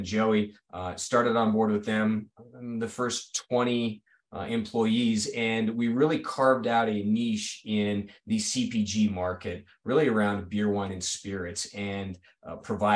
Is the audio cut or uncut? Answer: uncut